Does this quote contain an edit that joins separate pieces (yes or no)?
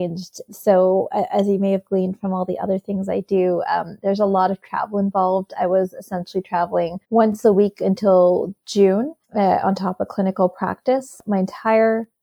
yes